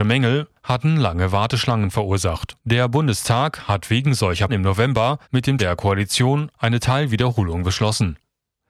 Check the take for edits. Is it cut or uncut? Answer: cut